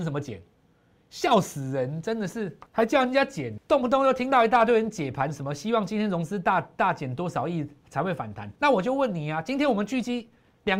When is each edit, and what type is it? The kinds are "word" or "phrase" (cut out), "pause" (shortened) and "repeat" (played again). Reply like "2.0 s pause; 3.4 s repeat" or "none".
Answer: 2.7 s pause; 3.6 s word; 8.6 s pause